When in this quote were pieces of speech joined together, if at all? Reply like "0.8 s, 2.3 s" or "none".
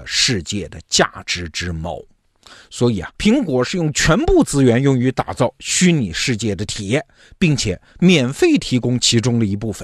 3.1 s